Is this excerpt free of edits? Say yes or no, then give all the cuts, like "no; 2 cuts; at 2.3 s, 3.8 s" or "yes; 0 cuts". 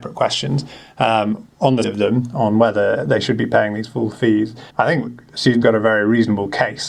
no; 3 cuts; at 1.8 s, 4.7 s, 5.6 s